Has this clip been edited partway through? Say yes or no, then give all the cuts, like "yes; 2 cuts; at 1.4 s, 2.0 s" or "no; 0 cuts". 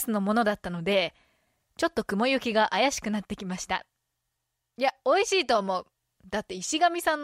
no; 0 cuts